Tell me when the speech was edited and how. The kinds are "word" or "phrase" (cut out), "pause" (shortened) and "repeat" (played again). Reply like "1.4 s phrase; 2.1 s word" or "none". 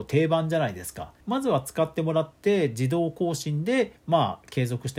1.2 s pause; 4.0 s pause